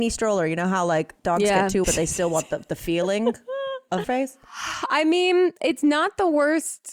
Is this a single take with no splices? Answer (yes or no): no